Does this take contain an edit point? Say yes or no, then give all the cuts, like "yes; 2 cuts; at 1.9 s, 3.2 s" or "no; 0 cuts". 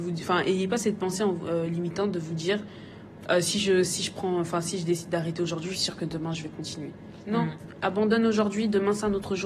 yes; 2 cuts; at 3.8 s, 5.7 s